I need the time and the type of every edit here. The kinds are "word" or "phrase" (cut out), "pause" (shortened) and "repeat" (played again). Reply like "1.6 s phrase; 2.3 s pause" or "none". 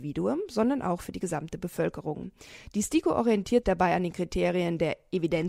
3.6 s word

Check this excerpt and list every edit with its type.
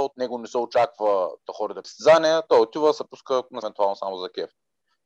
1.8 s word; 3.6 s word

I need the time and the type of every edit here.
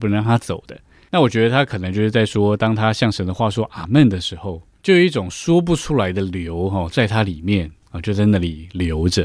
none

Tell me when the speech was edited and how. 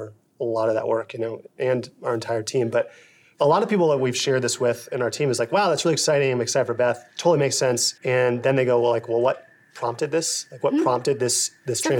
8.0 s pause

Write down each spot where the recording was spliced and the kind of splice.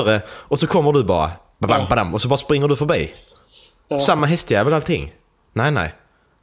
none

